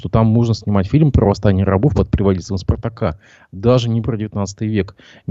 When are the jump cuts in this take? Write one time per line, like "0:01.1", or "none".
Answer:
none